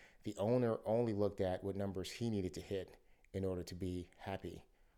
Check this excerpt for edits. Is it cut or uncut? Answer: uncut